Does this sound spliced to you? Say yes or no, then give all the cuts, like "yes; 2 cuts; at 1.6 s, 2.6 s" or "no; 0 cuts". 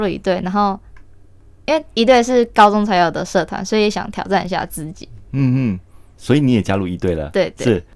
no; 0 cuts